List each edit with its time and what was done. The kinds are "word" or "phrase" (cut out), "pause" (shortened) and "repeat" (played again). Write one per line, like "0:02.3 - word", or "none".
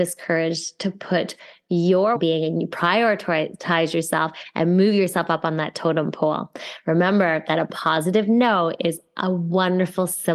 0:02.2 - word